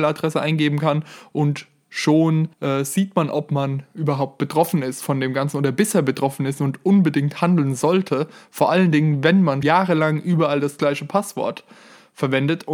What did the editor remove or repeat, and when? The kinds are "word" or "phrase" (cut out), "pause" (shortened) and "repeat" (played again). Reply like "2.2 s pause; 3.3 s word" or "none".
2.5 s pause; 9.6 s word